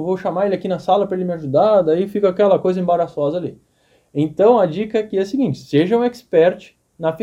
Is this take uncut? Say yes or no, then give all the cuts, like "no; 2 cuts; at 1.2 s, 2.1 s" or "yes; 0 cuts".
yes; 0 cuts